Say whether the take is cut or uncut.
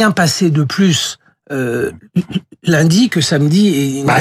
uncut